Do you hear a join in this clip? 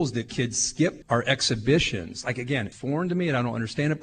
yes; 2 cuts; at 1.0 s, 2.7 s

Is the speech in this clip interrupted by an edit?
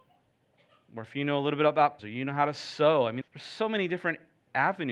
yes; 2 cuts; at 2.0 s, 3.2 s

